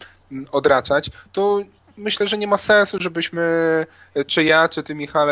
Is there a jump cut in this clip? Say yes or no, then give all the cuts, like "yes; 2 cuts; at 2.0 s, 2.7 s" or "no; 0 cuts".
no; 0 cuts